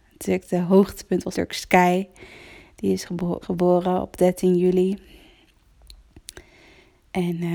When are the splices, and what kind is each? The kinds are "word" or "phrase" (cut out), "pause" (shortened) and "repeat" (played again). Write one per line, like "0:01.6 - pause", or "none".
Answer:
0:01.3 - word
0:03.4 - word